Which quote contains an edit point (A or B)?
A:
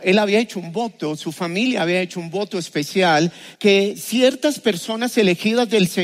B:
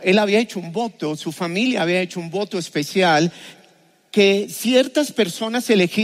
A